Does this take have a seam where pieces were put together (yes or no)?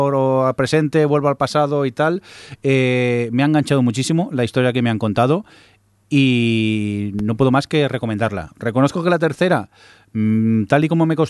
no